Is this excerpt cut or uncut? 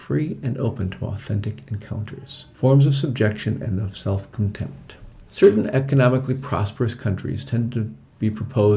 cut